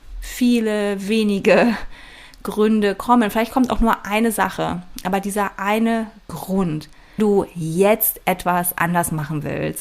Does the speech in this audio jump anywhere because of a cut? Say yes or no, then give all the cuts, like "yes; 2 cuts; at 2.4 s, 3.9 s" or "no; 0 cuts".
yes; 1 cut; at 7.2 s